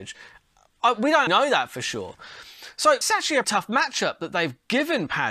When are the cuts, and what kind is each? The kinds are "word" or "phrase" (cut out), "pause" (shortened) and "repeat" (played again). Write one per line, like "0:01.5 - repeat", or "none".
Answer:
0:01.3 - word
0:03.0 - word
0:03.4 - word